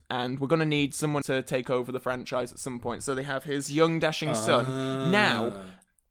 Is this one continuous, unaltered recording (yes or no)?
no